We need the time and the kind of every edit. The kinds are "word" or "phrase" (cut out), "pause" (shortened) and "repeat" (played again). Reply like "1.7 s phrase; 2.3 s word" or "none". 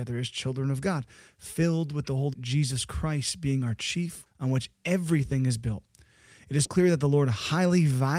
2.3 s word; 4.3 s word; 6.6 s word